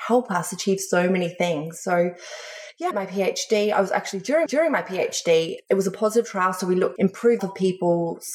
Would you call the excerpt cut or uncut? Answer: cut